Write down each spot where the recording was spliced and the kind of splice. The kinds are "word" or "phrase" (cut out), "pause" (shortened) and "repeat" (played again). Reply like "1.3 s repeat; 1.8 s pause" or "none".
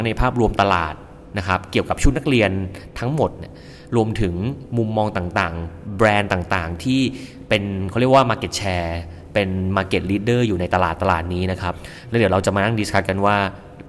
none